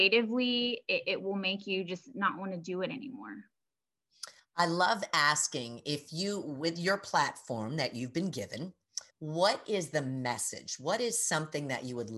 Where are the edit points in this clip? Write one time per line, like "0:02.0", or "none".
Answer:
0:09.1